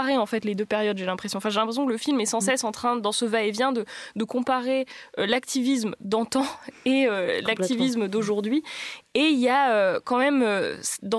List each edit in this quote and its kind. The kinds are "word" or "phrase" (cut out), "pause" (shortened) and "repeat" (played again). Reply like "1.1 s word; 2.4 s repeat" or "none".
none